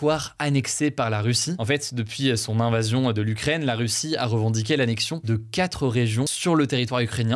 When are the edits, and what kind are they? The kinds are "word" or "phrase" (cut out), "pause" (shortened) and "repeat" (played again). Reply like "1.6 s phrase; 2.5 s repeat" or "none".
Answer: none

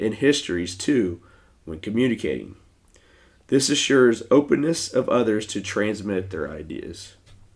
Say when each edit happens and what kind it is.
none

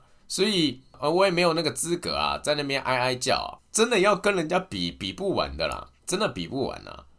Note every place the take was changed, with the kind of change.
3.6 s word; 6.0 s pause

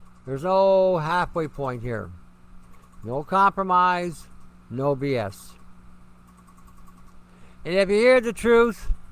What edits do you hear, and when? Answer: none

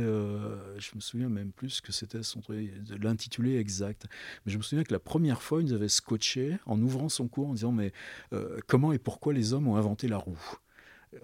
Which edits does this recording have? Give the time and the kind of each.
none

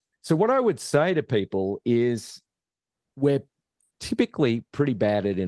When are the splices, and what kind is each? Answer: none

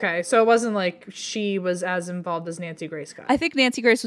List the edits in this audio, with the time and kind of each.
none

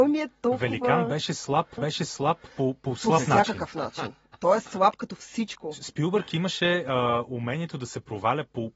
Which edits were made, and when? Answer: 1.8 s repeat

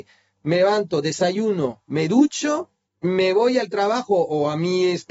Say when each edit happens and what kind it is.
2.9 s pause

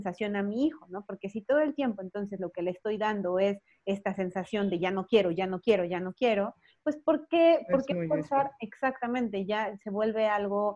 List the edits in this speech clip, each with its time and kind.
none

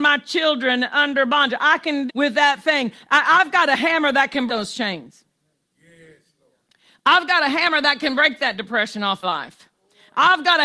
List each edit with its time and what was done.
2.1 s word; 4.5 s word; 9.2 s word

